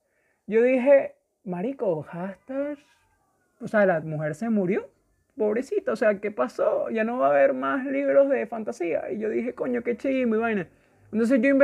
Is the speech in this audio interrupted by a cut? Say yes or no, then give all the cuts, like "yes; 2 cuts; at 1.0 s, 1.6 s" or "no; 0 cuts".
no; 0 cuts